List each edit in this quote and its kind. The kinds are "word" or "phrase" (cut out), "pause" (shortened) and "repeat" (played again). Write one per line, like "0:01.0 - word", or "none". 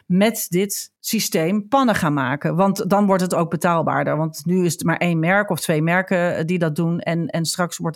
0:01.0 - pause